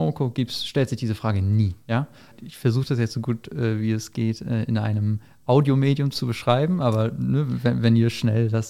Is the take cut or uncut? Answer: uncut